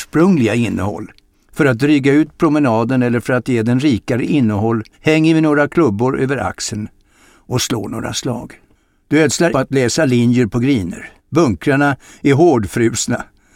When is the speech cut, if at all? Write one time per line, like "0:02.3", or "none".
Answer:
0:01.3
0:04.9
0:08.8
0:09.5
0:11.2